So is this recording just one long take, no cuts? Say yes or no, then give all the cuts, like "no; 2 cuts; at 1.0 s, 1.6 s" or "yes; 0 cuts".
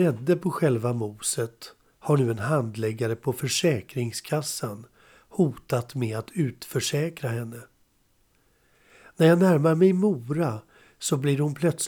yes; 0 cuts